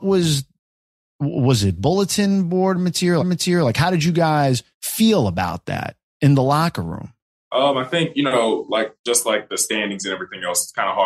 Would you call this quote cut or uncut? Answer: cut